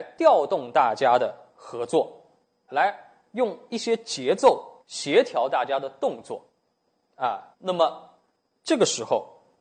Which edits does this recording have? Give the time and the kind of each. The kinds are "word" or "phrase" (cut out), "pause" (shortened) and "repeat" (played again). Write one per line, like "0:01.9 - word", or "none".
0:02.7 - word
0:04.8 - pause
0:07.5 - pause